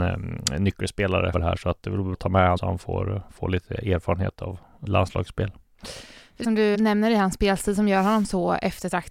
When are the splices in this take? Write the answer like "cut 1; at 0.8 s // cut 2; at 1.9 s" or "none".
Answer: cut 1; at 1.3 s // cut 2; at 2.1 s // cut 3; at 2.6 s // cut 4; at 4.9 s // cut 5; at 6.4 s // cut 6; at 6.7 s